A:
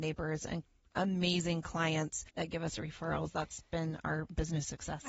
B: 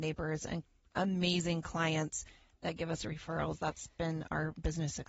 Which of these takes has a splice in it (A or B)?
A